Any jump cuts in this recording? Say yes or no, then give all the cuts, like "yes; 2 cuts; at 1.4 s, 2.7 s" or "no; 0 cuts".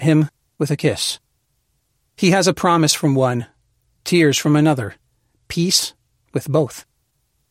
no; 0 cuts